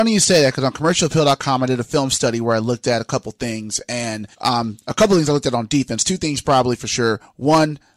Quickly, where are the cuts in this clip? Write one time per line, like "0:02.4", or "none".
0:04.3